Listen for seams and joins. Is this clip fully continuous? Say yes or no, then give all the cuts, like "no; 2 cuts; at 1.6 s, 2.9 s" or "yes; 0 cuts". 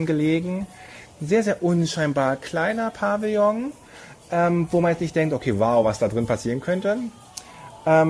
yes; 0 cuts